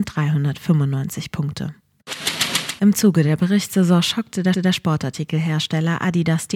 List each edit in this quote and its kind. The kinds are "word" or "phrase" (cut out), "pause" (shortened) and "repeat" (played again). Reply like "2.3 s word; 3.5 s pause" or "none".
4.5 s repeat